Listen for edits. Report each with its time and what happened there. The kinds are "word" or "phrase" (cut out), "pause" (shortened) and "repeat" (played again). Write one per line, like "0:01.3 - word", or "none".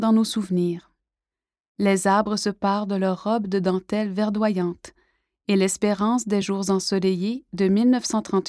none